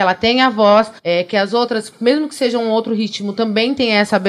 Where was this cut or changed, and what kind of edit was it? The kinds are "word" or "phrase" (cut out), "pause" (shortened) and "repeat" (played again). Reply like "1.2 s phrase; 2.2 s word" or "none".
1.0 s pause